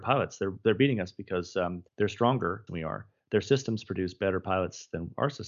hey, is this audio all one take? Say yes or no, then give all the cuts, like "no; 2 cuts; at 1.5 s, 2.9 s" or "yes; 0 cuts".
no; 2 cuts; at 1.9 s, 2.7 s